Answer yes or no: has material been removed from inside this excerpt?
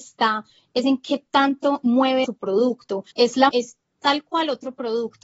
yes